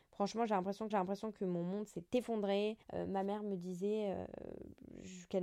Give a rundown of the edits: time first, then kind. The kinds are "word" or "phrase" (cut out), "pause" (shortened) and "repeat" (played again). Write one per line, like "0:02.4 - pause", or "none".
0:00.9 - repeat
0:02.8 - pause